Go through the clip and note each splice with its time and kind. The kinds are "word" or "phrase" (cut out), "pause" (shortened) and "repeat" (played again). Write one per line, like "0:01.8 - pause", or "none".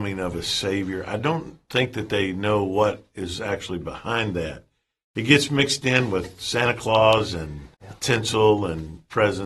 0:07.7 - pause